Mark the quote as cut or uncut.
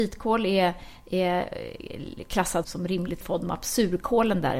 cut